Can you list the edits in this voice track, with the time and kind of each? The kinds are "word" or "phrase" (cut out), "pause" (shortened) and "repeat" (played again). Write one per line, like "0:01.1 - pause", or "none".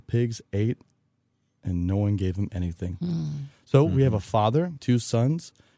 0:04.8 - phrase